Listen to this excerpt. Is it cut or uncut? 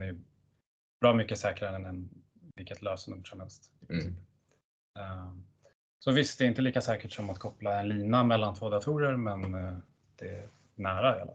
uncut